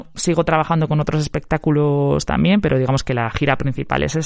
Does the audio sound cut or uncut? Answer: uncut